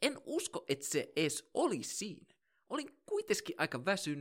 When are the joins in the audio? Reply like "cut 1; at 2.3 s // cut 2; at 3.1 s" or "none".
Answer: none

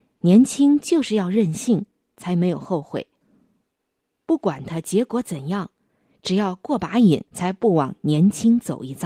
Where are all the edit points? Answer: cut 1; at 7.3 s

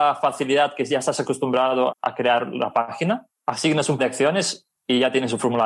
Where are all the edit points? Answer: cut 1; at 1.9 s // cut 2; at 3.3 s // cut 3; at 4.0 s

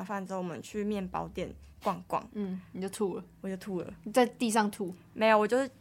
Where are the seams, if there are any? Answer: cut 1; at 1.7 s

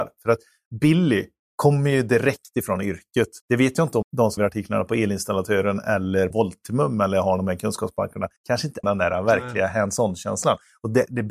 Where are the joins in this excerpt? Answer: cut 1; at 3.4 s // cut 2; at 4.0 s // cut 3; at 4.4 s // cut 4; at 6.3 s // cut 5; at 8.4 s // cut 6; at 8.8 s

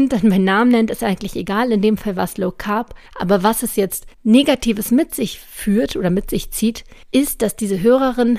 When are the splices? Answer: cut 1; at 3.1 s // cut 2; at 4.1 s // cut 3; at 7.0 s

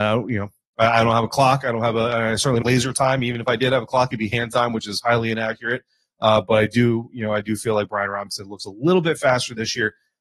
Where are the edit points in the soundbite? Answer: cut 1; at 2.6 s

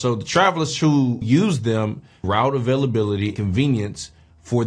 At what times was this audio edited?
cut 1; at 1.2 s // cut 2; at 2.2 s // cut 3; at 3.4 s

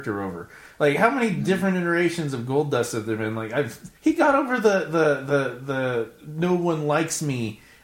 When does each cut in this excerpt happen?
cut 1; at 4.0 s

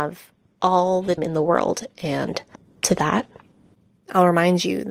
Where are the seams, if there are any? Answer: cut 1; at 1.2 s // cut 2; at 2.6 s

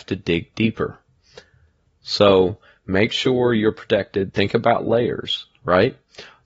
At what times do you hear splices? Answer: none

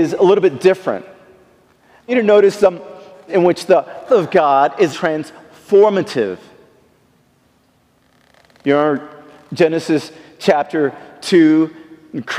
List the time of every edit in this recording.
cut 1; at 2.1 s // cut 2; at 3.3 s // cut 3; at 4.1 s // cut 4; at 4.9 s

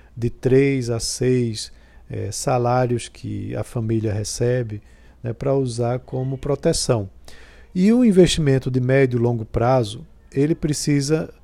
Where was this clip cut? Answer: none

